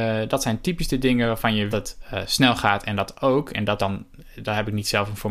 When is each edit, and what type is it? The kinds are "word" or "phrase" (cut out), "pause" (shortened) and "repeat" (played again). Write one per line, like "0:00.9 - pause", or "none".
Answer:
0:01.7 - phrase
0:03.8 - word